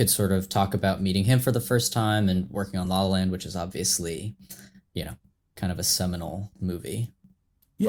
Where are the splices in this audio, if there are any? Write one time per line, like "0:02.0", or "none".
none